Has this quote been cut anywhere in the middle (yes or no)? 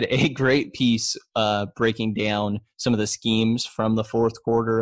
no